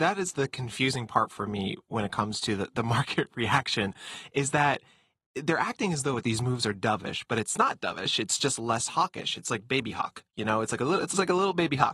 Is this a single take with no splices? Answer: no; 1 cut; at 10.3 s

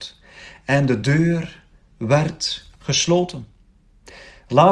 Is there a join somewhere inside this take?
no; 0 cuts

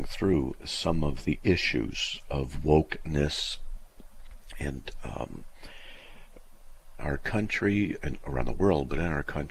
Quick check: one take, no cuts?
no; 3 cuts; at 1.2 s, 7.0 s, 8.0 s

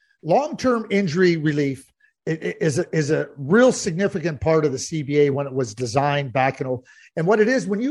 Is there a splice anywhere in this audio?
no; 0 cuts

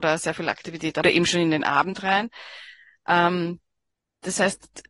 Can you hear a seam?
yes; 1 cut; at 1.0 s

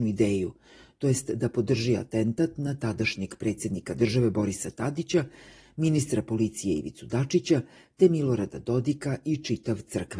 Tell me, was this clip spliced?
no; 0 cuts

